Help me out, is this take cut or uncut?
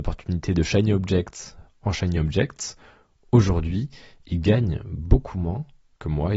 uncut